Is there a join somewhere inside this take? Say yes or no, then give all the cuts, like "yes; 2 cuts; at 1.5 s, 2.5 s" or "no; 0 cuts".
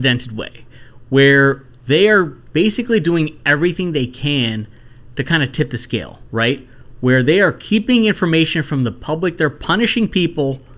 yes; 1 cut; at 6.3 s